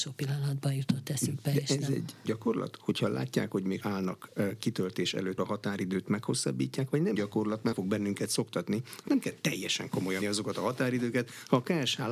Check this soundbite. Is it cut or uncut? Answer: cut